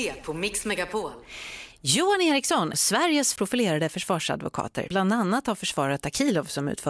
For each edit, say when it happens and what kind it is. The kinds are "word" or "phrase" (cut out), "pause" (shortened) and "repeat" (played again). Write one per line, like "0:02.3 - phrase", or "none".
0:02.7 - phrase
0:03.4 - phrase
0:04.9 - word